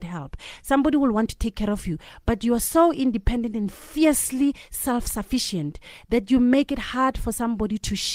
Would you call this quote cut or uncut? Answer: uncut